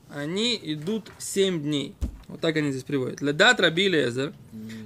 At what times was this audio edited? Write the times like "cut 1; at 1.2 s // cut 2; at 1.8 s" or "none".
cut 1; at 2.2 s